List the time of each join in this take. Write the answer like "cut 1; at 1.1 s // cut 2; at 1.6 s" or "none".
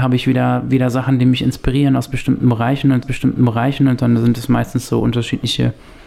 cut 1; at 3.0 s